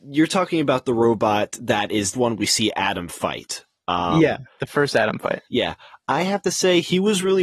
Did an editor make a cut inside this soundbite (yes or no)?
yes